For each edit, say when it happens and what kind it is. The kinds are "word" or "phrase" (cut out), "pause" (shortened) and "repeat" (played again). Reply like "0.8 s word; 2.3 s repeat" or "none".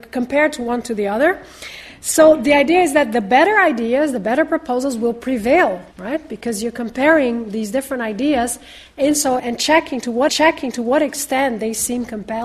5.9 s pause; 9.4 s word; 10.3 s repeat